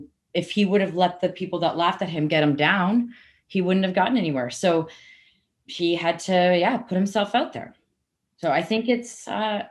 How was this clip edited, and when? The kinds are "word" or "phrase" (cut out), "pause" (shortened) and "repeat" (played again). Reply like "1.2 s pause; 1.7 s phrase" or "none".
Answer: none